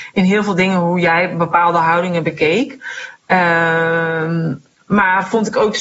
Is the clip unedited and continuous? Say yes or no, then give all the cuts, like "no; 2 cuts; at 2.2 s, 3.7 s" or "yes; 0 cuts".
yes; 0 cuts